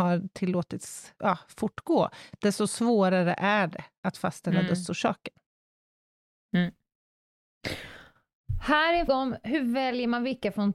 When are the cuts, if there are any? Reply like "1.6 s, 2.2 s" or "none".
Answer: 1.2 s, 9.1 s